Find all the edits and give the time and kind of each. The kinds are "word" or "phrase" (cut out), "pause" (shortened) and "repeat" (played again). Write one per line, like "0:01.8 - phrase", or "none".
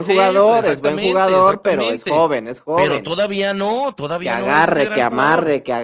none